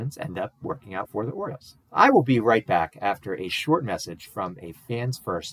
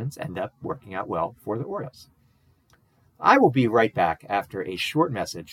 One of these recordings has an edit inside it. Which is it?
first; 2 cuts; at 1.0 s, 1.8 s

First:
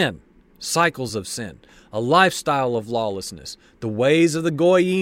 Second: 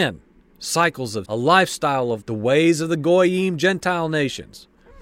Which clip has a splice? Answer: second; 2 cuts; at 1.2 s, 2.2 s

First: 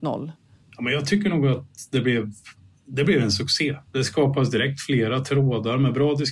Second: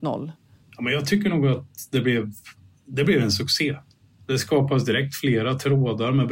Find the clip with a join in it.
first; 1 cut; at 3.9 s

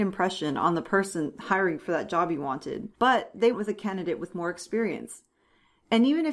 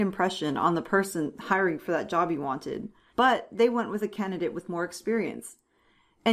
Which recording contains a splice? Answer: first; 2 cuts; at 2.9 s, 3.5 s

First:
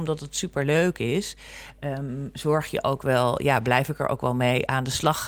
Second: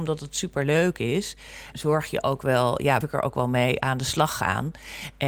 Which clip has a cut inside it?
second; 2 cuts; at 1.7 s, 3.0 s

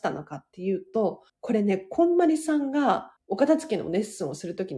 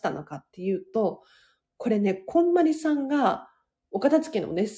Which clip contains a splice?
first; 2 cuts; at 1.3 s, 3.2 s

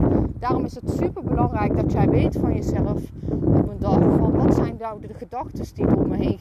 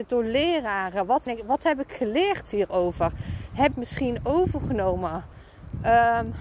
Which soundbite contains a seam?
second; 2 cuts; at 1.3 s, 3.7 s

